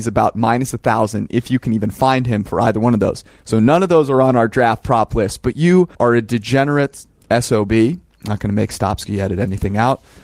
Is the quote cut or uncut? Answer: cut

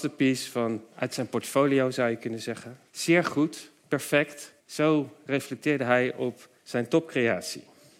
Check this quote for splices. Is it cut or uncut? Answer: cut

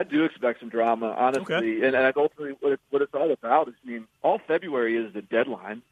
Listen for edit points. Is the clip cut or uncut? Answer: cut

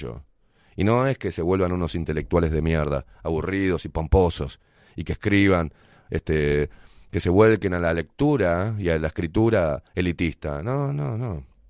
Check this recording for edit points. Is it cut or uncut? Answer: uncut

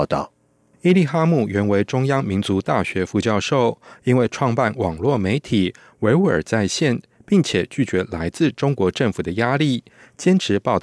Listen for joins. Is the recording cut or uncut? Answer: uncut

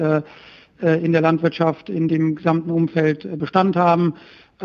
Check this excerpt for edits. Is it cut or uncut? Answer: uncut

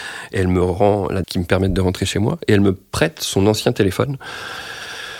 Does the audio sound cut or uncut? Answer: cut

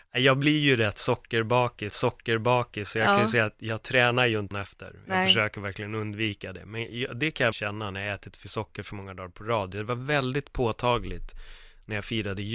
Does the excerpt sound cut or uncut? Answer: cut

